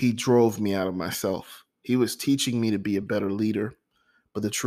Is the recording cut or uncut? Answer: uncut